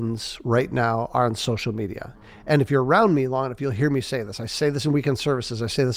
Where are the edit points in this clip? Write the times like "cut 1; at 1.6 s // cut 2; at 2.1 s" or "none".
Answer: none